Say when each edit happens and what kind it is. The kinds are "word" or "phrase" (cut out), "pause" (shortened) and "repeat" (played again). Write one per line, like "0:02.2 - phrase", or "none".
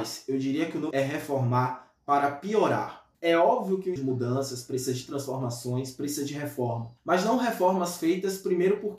0:00.9 - phrase
0:03.1 - pause
0:04.0 - phrase
0:07.0 - pause

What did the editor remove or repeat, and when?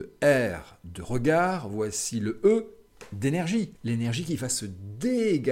0:03.7 - pause

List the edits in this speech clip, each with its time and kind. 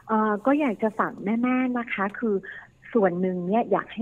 none

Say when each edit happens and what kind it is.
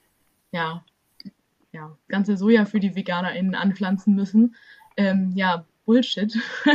0:02.1 - phrase

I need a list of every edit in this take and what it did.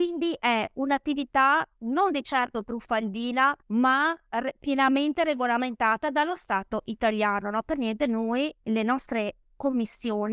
0:03.6 - pause
0:08.6 - pause

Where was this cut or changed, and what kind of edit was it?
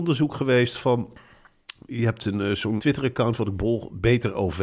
0:02.8 - word

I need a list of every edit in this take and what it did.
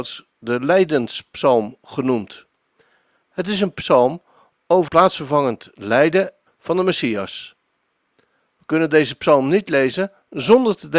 0:03.7 - word
0:04.9 - word
0:06.5 - phrase

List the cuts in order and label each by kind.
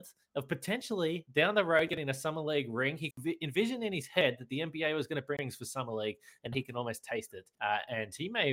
0:03.1 - word
0:05.4 - word
0:06.5 - word
0:07.5 - pause

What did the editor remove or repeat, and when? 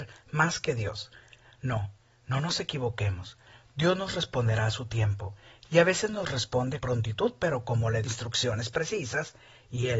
0:06.8 - word
0:08.0 - word

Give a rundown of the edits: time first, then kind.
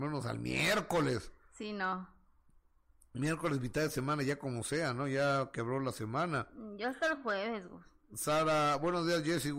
none

